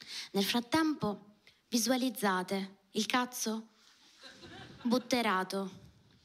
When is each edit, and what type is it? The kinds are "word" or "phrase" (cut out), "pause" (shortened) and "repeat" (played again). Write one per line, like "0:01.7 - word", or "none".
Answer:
none